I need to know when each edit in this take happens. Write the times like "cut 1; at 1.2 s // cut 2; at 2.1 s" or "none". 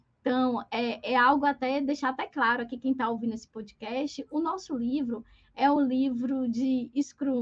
none